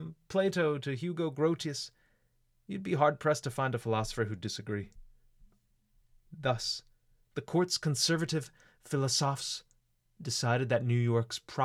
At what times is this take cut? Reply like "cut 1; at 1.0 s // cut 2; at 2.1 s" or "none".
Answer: none